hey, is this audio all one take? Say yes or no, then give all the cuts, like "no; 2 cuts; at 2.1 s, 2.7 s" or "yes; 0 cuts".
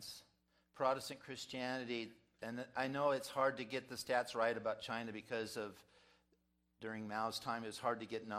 yes; 0 cuts